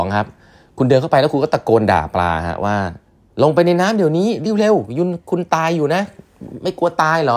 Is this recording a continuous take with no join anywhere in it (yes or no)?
no